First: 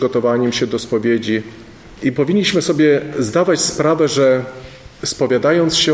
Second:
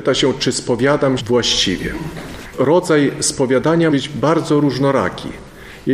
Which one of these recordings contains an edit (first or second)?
second